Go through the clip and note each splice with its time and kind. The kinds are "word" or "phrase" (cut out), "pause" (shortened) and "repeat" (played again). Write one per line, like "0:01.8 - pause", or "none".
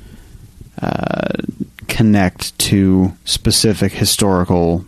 0:03.2 - pause